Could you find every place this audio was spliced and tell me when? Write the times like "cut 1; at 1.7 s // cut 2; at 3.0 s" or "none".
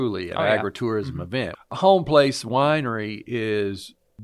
none

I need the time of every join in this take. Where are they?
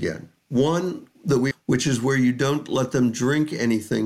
cut 1; at 1.5 s

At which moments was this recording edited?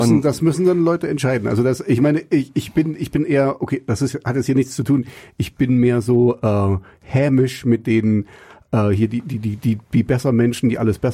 none

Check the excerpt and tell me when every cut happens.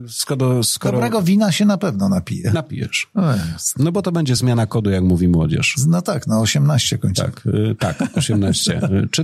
none

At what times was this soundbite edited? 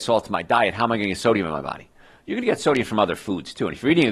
none

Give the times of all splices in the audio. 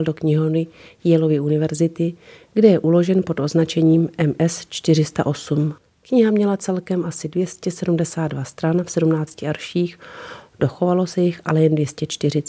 none

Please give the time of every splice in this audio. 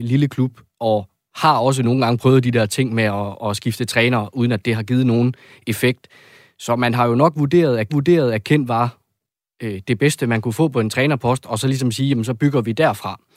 cut 1; at 7.9 s

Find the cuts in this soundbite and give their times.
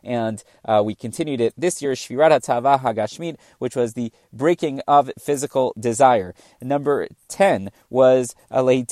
none

